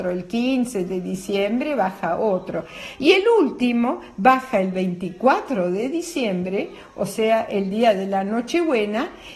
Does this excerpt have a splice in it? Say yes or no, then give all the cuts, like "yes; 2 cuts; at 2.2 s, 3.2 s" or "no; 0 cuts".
no; 0 cuts